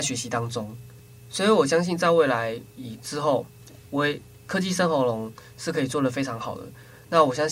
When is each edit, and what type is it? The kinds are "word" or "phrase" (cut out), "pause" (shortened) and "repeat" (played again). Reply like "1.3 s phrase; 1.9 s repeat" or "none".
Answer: 2.7 s pause